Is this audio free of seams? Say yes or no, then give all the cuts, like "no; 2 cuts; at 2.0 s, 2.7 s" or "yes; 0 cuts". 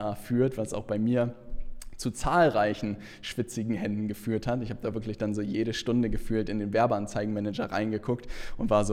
yes; 0 cuts